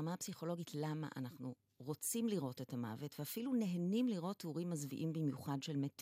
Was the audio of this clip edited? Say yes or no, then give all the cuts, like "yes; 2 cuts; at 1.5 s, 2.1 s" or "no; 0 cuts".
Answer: no; 0 cuts